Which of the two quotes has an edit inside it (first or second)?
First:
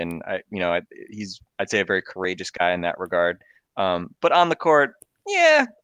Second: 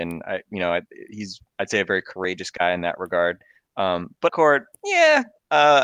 second